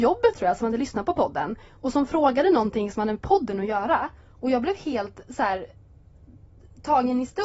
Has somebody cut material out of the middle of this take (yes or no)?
no